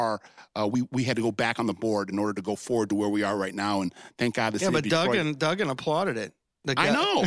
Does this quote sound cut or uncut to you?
uncut